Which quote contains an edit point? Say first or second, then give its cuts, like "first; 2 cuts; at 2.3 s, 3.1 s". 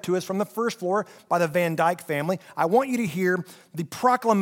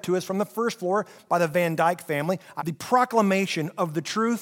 second; 1 cut; at 2.6 s